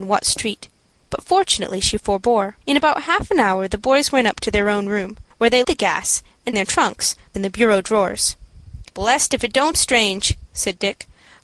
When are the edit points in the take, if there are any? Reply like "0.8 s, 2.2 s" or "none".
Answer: 2.6 s, 5.3 s, 5.6 s, 6.5 s, 7.3 s, 8.9 s, 9.7 s